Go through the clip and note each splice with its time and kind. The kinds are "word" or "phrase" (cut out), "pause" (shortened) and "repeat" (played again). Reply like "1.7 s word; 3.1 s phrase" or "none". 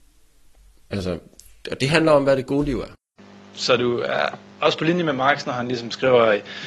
none